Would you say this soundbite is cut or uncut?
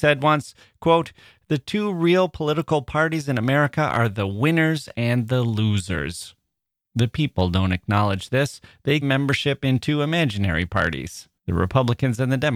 cut